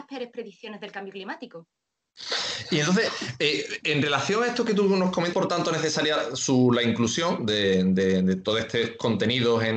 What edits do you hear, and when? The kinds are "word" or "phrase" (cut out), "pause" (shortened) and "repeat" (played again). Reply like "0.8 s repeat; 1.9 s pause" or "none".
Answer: 5.3 s phrase